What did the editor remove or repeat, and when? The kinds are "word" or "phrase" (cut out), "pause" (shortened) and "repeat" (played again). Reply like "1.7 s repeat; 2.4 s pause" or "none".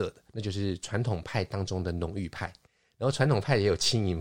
2.7 s pause